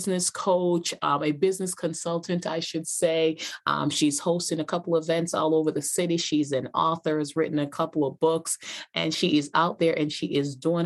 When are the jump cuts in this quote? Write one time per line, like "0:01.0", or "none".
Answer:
none